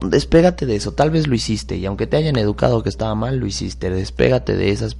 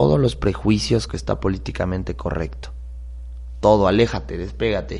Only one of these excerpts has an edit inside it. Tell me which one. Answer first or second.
second